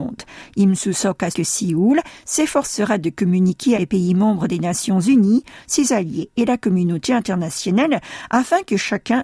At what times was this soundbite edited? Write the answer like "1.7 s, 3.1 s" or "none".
1.3 s, 3.7 s